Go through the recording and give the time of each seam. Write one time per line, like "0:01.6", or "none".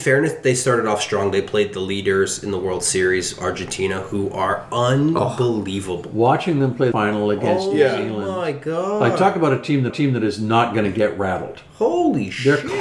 0:06.9
0:09.9